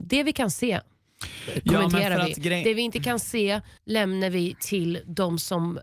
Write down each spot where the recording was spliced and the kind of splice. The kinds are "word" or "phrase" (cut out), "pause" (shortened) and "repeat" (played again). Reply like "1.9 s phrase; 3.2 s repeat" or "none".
3.8 s pause